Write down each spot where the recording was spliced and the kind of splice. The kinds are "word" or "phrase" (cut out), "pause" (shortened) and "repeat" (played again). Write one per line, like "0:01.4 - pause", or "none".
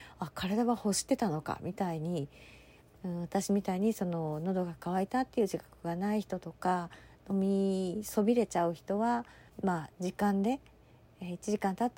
0:09.5 - pause